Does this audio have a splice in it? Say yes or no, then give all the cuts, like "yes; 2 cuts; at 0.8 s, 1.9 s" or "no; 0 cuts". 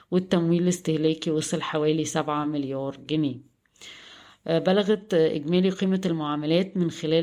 no; 0 cuts